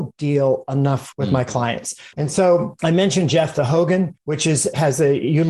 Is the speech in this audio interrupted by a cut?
yes; 1 cut; at 1.1 s

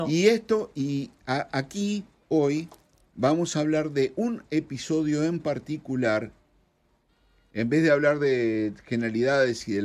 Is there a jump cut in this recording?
no; 0 cuts

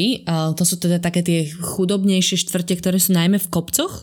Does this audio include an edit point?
no; 0 cuts

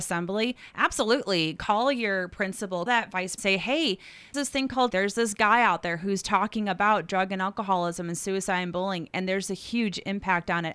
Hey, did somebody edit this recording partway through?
yes; 4 cuts; at 2.9 s, 3.4 s, 4.3 s, 4.9 s

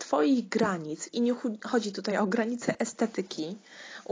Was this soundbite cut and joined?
no; 0 cuts

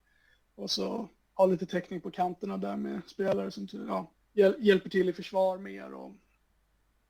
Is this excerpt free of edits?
no; 2 cuts; at 1.2 s, 4.2 s

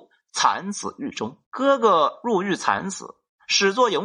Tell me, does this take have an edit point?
yes; 1 cut; at 1.5 s

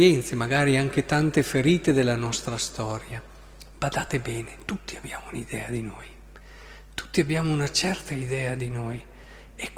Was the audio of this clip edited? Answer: no; 0 cuts

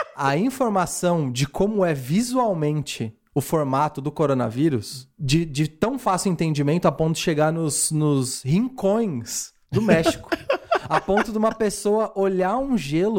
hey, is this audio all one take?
yes; 0 cuts

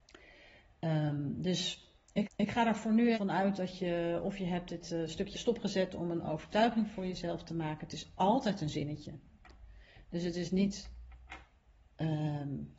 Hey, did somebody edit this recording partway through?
yes; 3 cuts; at 2.2 s, 3.1 s, 5.3 s

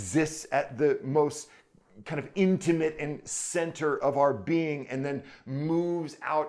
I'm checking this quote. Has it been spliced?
no; 0 cuts

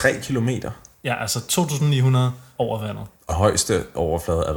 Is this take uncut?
no; 2 cuts; at 2.5 s, 3.3 s

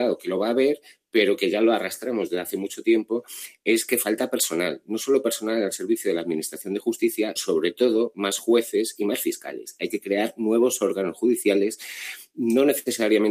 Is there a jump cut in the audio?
yes; 1 cut; at 7.4 s

